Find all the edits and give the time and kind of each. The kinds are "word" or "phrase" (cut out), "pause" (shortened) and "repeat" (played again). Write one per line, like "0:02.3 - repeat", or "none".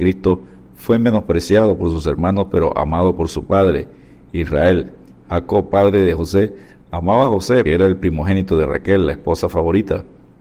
0:07.7 - word